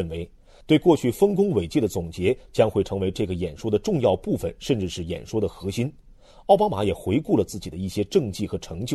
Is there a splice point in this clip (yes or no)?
no